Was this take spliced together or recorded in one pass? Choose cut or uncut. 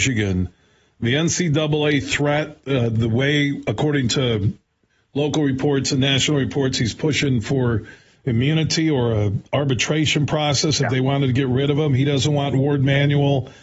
uncut